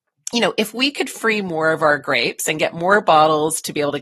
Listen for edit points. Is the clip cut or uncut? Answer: uncut